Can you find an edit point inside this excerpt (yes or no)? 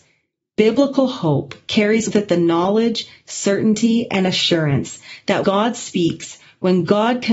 yes